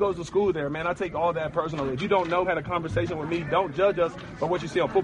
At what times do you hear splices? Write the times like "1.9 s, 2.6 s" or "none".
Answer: 2.4 s